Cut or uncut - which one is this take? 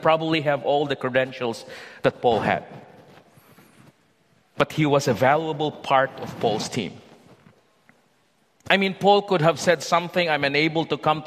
uncut